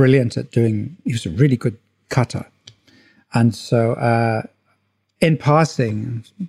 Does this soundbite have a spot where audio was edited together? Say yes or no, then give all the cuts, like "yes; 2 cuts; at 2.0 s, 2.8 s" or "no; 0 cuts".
no; 0 cuts